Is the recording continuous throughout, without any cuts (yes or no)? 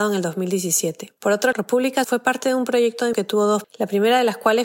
no